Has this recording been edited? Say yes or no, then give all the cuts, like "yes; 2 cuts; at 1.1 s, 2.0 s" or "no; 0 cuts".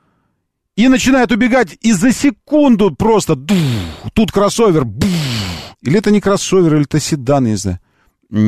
yes; 1 cut; at 5.7 s